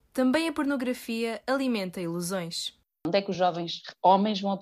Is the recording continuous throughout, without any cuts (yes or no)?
yes